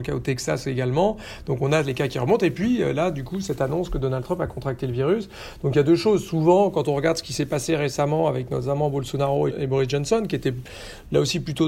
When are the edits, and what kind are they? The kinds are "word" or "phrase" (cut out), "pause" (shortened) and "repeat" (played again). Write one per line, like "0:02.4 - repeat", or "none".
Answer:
0:09.5 - word